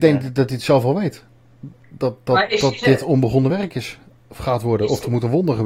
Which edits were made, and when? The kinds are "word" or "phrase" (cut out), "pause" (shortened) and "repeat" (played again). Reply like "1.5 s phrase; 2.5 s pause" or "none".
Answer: none